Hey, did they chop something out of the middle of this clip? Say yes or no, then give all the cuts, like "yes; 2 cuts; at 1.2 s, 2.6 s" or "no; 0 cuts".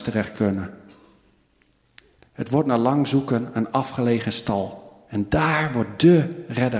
no; 0 cuts